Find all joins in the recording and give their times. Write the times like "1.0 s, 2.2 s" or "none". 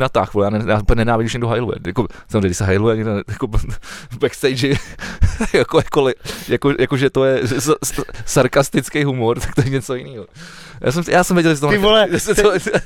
none

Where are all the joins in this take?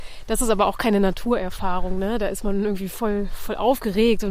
none

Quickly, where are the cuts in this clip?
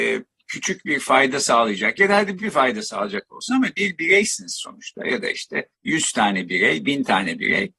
2.4 s, 5.7 s

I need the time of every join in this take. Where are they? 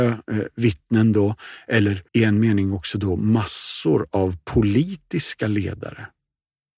2.1 s

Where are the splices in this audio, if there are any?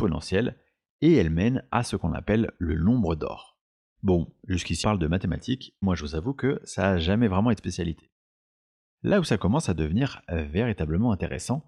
3.7 s, 4.8 s, 5.8 s, 7.6 s

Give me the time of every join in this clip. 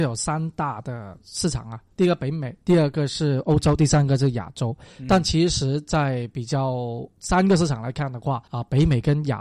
2.6 s, 7.1 s, 8.5 s

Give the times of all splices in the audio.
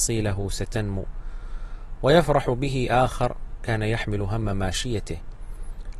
none

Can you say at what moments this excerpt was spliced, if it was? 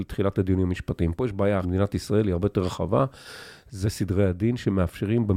1.6 s, 3.8 s

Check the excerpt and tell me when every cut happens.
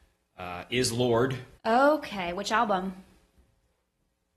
1.6 s

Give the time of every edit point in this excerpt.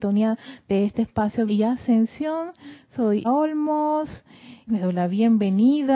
1.5 s, 3.2 s, 4.7 s

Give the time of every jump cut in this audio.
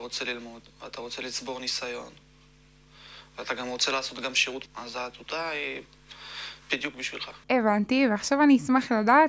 4.7 s, 6.6 s, 7.4 s

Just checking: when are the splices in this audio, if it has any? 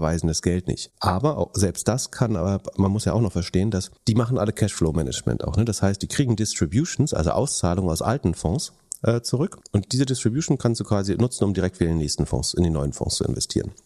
4.0 s, 9.6 s

